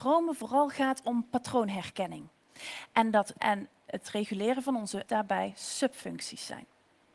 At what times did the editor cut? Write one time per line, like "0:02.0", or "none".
0:03.4
0:05.1

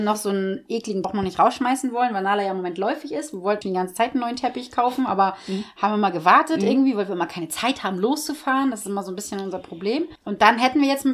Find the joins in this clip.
0:01.0
0:03.6

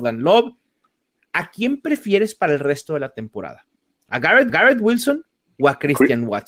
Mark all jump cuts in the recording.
0:04.5

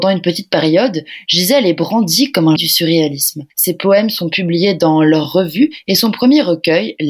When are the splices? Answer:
0:02.6
0:03.5

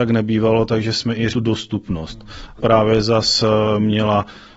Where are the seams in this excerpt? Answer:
0:01.3
0:02.6

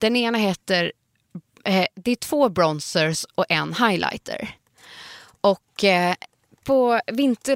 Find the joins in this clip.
none

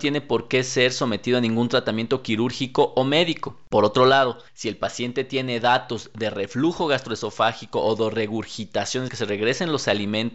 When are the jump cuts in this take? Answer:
0:04.5
0:09.1

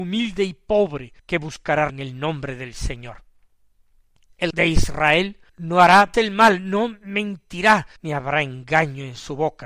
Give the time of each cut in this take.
0:01.2
0:01.9
0:04.5
0:05.5
0:06.1
0:08.0

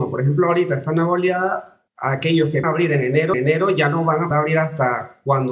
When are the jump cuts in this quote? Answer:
0:01.9
0:02.6
0:03.3
0:04.3

